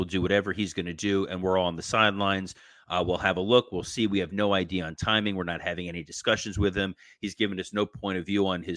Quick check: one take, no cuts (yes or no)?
yes